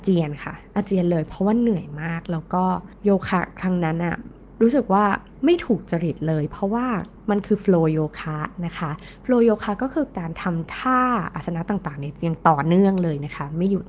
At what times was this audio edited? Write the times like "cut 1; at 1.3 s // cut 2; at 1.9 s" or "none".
none